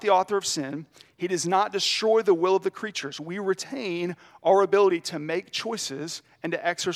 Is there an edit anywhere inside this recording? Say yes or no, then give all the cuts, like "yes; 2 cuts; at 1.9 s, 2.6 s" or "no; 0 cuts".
no; 0 cuts